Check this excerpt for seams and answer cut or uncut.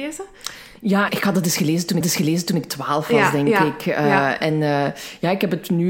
cut